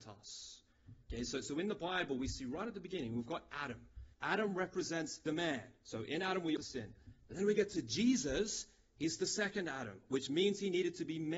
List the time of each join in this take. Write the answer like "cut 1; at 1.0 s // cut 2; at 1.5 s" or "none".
cut 1; at 4.1 s // cut 2; at 5.3 s // cut 3; at 6.6 s